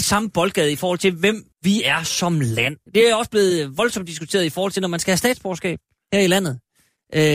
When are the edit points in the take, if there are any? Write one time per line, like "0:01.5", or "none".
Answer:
0:01.5
0:02.9
0:05.9